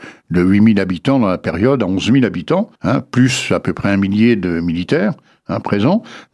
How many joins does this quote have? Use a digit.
1